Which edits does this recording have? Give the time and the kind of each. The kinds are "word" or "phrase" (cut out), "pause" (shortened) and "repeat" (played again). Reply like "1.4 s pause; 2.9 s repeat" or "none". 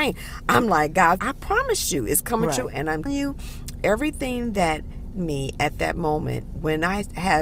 1.2 s word; 3.1 s word; 5.1 s word